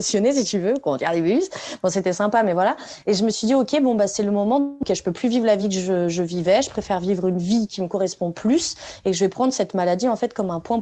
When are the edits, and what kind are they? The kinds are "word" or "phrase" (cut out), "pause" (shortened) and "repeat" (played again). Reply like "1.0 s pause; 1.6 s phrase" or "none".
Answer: none